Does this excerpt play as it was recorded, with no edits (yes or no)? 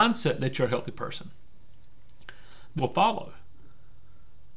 no